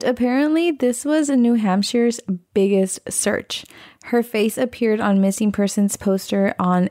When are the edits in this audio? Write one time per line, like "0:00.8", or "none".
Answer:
none